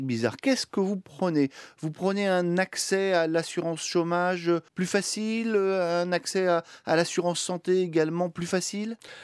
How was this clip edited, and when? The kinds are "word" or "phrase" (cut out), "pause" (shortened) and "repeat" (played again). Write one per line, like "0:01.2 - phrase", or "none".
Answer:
0:04.7 - pause